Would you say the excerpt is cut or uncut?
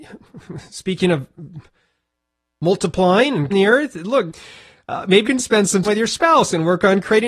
cut